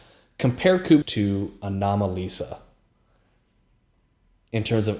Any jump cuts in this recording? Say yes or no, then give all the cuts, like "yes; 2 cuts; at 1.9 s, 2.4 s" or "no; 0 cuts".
yes; 1 cut; at 1.0 s